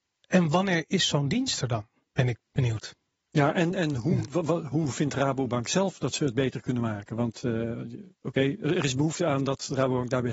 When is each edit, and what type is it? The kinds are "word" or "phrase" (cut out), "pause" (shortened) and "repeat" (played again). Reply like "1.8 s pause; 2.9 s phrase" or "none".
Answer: none